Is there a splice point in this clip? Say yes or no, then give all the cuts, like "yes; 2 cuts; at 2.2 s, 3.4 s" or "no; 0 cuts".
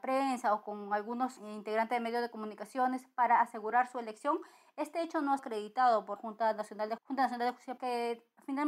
yes; 5 cuts; at 1.4 s, 5.4 s, 6.2 s, 7.0 s, 7.8 s